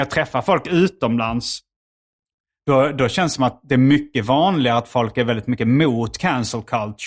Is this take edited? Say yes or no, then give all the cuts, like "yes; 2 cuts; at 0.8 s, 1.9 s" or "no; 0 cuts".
no; 0 cuts